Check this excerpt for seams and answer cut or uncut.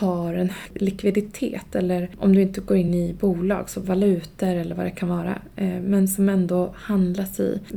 uncut